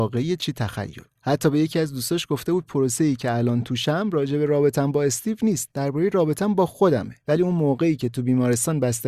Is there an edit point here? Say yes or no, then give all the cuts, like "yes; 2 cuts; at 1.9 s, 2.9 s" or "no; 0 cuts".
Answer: yes; 2 cuts; at 1.1 s, 7.2 s